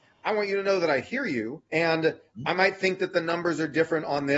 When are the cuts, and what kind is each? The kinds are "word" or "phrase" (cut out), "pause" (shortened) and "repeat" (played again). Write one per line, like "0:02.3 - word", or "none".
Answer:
0:01.7 - pause